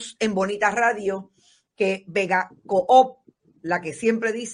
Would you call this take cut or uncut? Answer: uncut